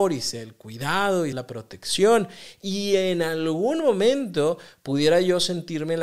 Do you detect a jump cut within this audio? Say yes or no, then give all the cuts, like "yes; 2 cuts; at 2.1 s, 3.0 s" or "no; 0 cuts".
yes; 1 cut; at 1.3 s